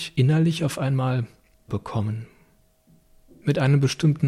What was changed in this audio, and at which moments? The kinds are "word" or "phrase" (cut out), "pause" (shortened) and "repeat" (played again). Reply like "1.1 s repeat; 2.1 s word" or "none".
1.7 s word